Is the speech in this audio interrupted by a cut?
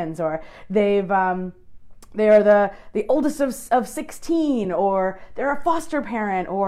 no; 0 cuts

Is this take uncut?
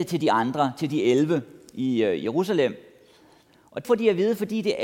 no; 1 cut; at 3.8 s

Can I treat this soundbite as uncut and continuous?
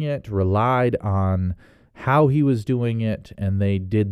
yes; 0 cuts

